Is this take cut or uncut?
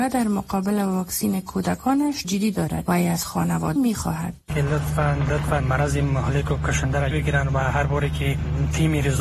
cut